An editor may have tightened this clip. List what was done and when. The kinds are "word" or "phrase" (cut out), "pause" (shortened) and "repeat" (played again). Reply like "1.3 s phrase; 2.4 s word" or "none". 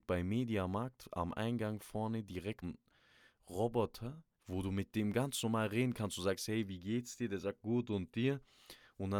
2.6 s word; 4.3 s pause